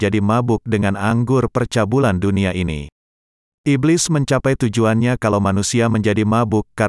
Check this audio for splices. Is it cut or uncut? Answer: uncut